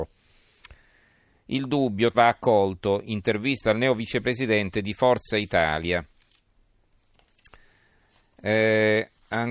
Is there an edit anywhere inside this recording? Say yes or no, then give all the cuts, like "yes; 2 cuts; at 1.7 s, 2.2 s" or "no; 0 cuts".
yes; 1 cut; at 2.1 s